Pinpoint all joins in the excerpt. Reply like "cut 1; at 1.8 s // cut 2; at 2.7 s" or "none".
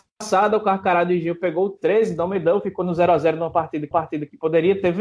cut 1; at 3.9 s